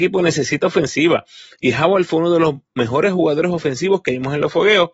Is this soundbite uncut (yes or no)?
yes